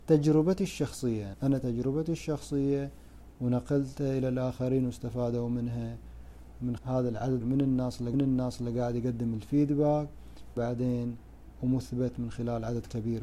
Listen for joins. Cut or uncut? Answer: cut